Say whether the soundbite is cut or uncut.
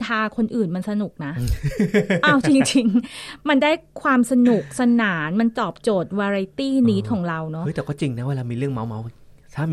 uncut